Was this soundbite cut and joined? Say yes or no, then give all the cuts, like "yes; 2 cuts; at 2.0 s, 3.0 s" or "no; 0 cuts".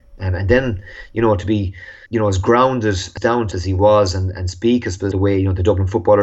yes; 5 cuts; at 2.1 s, 3.2 s, 3.5 s, 4.3 s, 5.1 s